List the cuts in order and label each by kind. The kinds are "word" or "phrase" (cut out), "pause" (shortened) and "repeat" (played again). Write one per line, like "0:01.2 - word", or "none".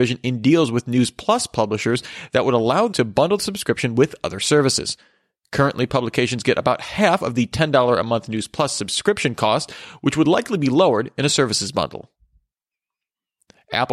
0:02.9 - word